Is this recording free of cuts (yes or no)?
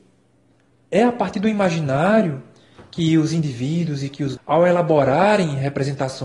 no